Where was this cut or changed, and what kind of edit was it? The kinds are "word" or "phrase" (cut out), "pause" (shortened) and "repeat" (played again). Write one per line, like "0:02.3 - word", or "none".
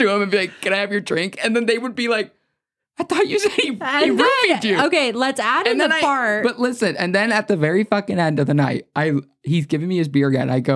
none